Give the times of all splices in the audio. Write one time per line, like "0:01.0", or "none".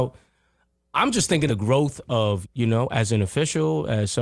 0:01.5
0:02.4